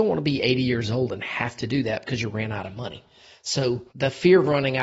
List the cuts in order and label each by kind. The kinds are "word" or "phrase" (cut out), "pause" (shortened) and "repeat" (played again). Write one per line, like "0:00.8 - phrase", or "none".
0:03.9 - pause